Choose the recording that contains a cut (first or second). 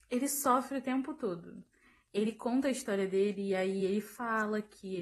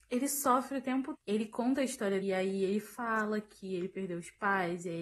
second